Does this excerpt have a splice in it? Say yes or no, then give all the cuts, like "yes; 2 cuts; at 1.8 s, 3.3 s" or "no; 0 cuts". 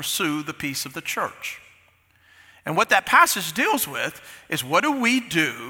no; 0 cuts